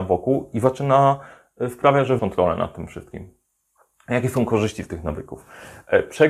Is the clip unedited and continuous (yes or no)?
no